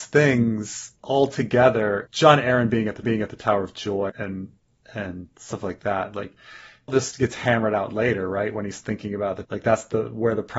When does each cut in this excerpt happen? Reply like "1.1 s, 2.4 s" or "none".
1.0 s, 2.1 s, 3.0 s, 4.1 s, 6.9 s, 9.4 s